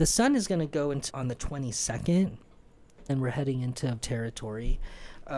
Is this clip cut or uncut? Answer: cut